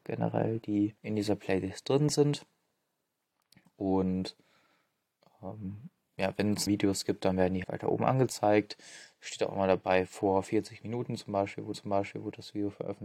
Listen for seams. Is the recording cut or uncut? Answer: cut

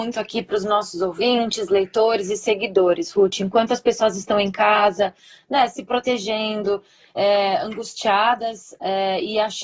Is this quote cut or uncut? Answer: uncut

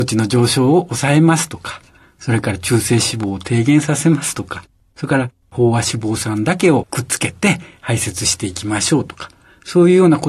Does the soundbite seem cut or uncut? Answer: uncut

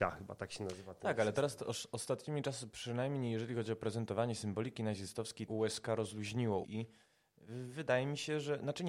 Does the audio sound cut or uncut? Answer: cut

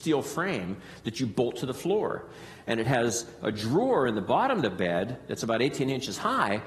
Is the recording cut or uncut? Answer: uncut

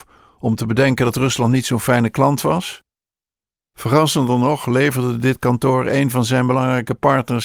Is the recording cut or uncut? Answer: uncut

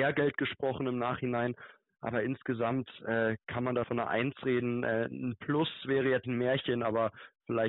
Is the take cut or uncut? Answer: cut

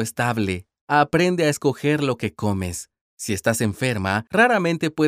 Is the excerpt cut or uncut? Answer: uncut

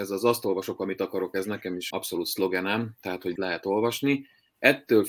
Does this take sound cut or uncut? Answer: cut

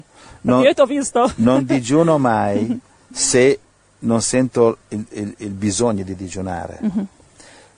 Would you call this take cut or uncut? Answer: uncut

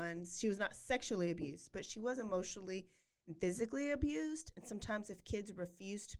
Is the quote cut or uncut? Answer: uncut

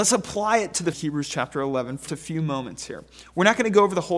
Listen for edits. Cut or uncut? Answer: cut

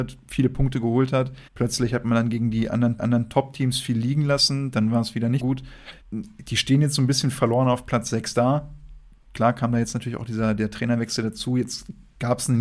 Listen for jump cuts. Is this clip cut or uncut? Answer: cut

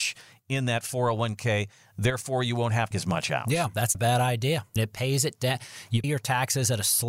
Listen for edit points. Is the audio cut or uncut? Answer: cut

